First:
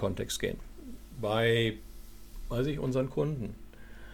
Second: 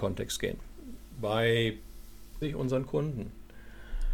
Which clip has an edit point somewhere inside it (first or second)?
second